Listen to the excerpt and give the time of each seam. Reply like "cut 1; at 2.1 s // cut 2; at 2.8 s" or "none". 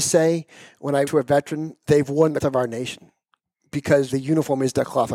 cut 1; at 1.0 s // cut 2; at 1.9 s // cut 3; at 2.4 s // cut 4; at 4.1 s